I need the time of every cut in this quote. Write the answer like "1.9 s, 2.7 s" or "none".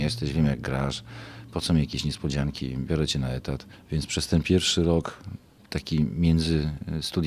none